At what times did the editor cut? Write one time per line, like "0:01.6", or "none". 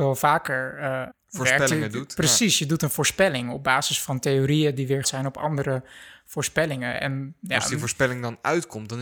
0:01.1
0:05.0